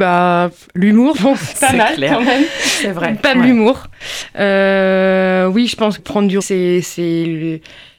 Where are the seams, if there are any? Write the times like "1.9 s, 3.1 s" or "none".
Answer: 1.1 s, 1.5 s, 3.3 s, 6.0 s, 6.4 s